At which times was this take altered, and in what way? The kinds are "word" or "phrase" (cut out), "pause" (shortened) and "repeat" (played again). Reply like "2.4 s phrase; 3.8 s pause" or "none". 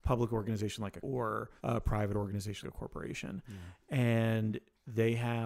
1.0 s word; 1.6 s pause; 2.6 s word

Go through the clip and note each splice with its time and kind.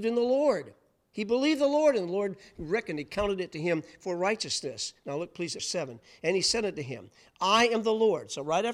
5.6 s phrase

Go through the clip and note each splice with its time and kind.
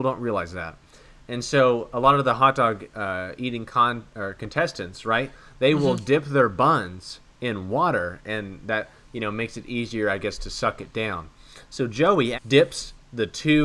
12.3 s word

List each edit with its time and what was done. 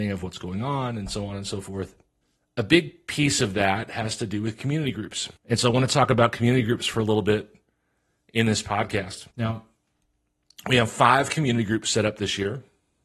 2.2 s pause; 5.4 s pause; 9.3 s pause

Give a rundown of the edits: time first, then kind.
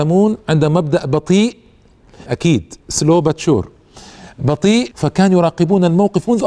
2.3 s word; 2.8 s pause; 4.9 s phrase

